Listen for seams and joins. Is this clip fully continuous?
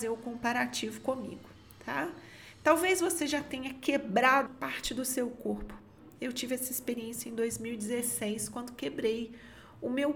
no; 1 cut; at 4.5 s

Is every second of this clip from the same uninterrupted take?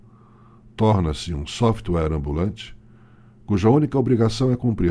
yes; 0 cuts

